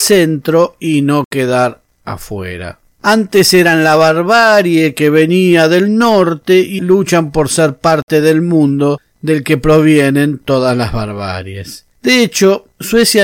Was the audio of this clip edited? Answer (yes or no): yes